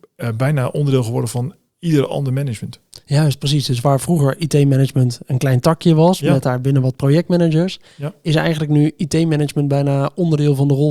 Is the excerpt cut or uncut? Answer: uncut